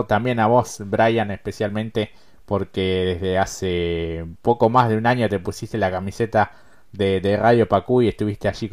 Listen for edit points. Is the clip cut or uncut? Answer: uncut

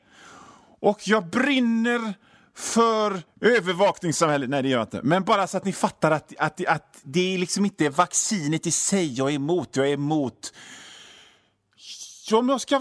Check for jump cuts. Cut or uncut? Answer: cut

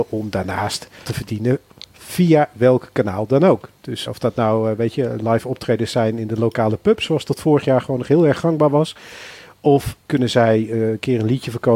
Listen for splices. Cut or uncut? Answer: cut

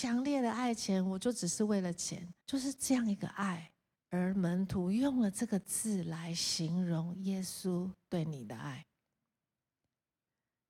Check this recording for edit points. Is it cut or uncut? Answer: cut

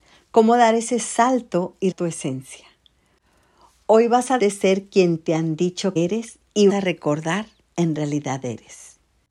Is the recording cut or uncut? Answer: cut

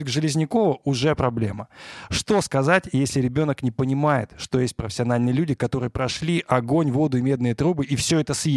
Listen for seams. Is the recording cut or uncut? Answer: uncut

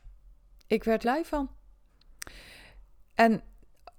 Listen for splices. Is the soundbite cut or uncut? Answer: cut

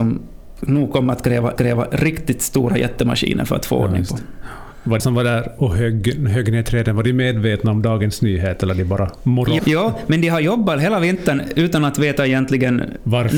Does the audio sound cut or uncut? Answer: cut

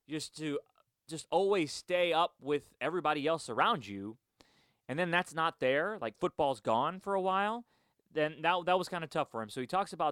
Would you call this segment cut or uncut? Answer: uncut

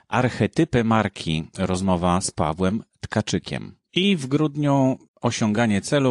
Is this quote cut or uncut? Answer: cut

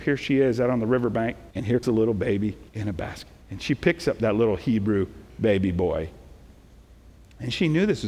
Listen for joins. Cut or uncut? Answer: cut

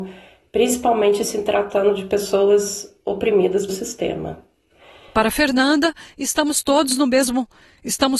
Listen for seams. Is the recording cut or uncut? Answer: cut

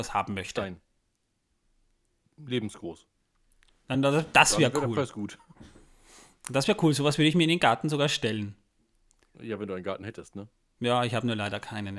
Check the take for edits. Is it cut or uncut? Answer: uncut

